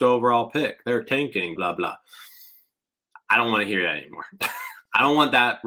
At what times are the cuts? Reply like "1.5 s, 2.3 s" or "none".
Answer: 1.6 s